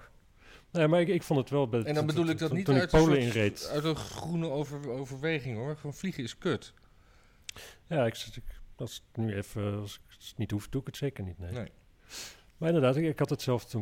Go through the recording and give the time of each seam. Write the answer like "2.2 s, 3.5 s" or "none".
12.5 s